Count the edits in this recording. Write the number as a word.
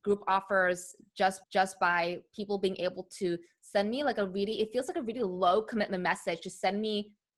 one